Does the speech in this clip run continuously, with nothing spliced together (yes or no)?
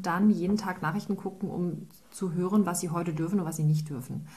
yes